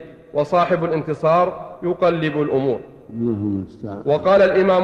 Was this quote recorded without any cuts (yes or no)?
yes